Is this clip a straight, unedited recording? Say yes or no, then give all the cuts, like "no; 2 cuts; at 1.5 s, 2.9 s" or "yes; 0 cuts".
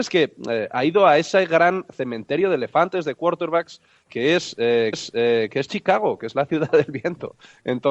no; 1 cut; at 4.9 s